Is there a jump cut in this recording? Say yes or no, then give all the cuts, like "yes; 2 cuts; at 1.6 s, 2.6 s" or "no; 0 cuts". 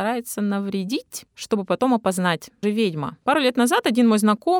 yes; 1 cut; at 2.6 s